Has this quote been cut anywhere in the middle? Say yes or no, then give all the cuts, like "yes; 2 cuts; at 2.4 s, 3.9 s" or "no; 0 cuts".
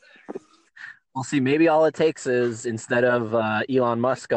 no; 0 cuts